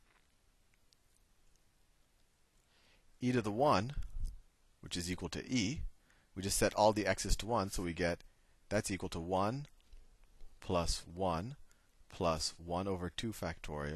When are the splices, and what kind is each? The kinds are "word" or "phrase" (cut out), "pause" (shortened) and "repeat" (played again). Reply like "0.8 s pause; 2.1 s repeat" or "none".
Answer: none

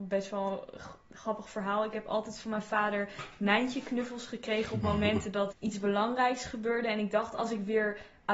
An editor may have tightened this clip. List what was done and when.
5.5 s word

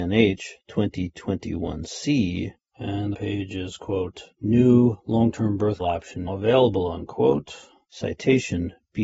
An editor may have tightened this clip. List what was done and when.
3.1 s word; 5.8 s word; 6.3 s word

